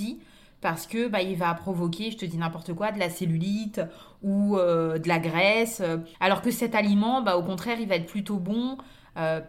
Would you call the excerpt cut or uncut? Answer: cut